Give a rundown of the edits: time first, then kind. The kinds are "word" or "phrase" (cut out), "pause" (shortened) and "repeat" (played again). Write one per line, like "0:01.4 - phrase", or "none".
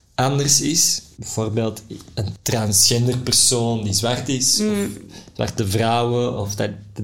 0:01.2 - word